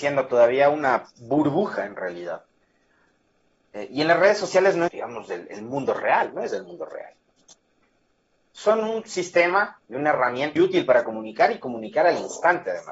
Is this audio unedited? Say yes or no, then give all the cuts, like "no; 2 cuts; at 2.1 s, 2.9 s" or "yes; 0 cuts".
no; 3 cuts; at 1.1 s, 4.9 s, 10.6 s